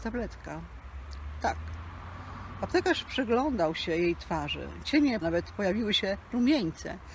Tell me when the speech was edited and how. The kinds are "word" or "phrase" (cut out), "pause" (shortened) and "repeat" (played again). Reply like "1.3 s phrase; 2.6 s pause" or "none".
5.2 s phrase

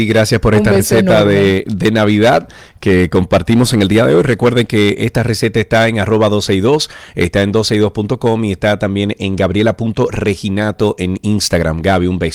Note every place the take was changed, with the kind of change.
none

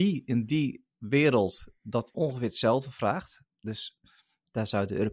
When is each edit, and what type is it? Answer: 2.1 s word

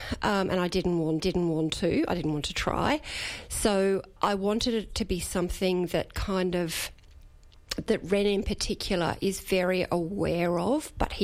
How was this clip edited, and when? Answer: 1.2 s repeat; 4.2 s word

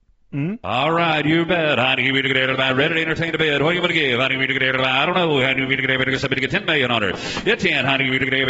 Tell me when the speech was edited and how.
none

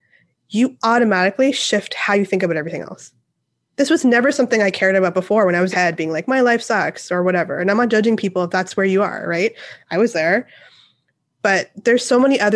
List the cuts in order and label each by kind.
5.7 s phrase

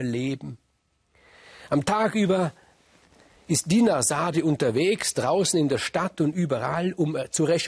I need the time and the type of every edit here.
none

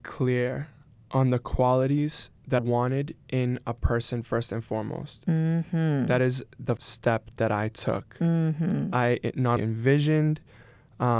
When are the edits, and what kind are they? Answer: 2.6 s word; 6.8 s word; 9.6 s word

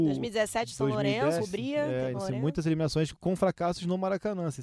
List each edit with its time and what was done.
1.4 s phrase; 2.1 s word; 3.1 s word

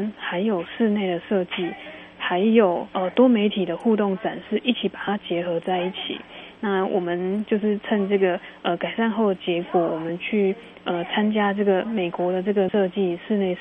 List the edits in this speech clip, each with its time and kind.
12.7 s word

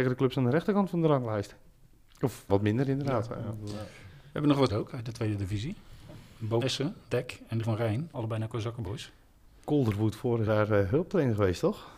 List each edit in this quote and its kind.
2.5 s word; 4.7 s word; 6.6 s word; 7.1 s word; 7.6 s word; 8.1 s word; 10.5 s word

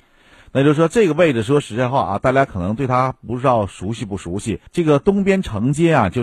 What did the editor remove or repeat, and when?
4.7 s pause

